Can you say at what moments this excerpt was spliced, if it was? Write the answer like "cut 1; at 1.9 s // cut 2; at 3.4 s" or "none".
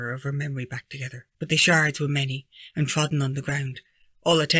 cut 1; at 1.3 s